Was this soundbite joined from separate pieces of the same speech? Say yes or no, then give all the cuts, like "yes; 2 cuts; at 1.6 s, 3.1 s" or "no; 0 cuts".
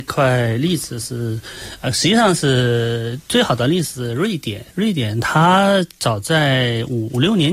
yes; 1 cut; at 4.7 s